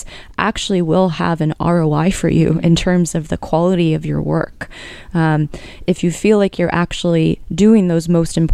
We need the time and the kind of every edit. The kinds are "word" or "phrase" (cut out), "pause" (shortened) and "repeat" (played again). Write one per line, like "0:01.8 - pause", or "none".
none